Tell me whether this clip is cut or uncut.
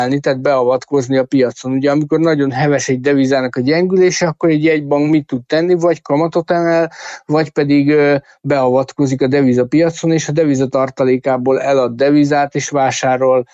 uncut